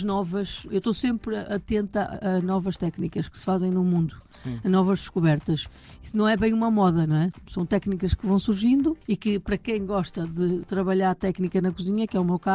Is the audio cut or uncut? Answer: uncut